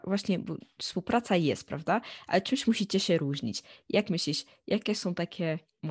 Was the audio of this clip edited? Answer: no; 0 cuts

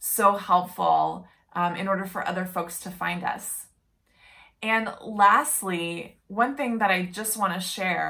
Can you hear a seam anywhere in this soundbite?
no; 0 cuts

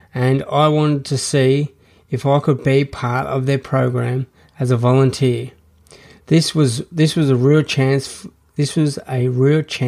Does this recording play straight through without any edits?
yes; 0 cuts

